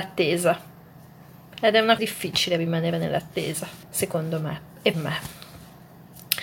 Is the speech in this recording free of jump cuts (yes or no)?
no